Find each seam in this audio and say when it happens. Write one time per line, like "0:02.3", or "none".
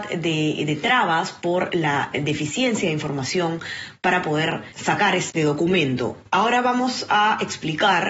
0:05.3